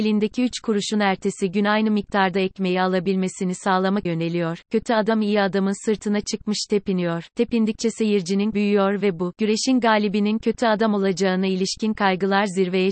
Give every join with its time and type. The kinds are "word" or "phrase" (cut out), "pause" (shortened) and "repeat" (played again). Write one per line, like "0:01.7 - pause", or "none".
0:04.1 - phrase
0:08.5 - word